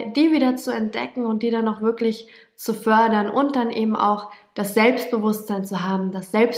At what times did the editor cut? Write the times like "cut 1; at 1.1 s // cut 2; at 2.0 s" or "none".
none